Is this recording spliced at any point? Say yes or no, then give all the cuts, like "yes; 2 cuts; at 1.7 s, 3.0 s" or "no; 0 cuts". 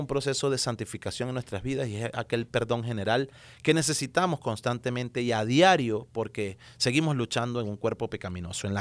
no; 0 cuts